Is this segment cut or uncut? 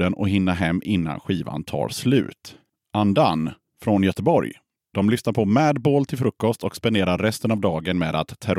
uncut